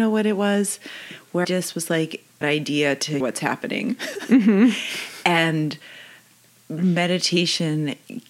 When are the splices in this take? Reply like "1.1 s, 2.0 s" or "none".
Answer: 1.4 s, 2.4 s, 3.2 s